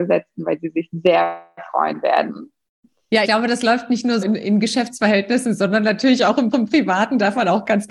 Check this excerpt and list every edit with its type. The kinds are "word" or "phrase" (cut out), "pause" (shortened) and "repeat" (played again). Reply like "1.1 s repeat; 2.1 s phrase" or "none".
3.2 s word; 4.2 s word; 6.5 s repeat